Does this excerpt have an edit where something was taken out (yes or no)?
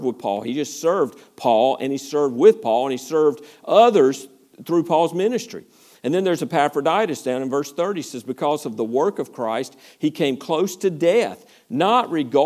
no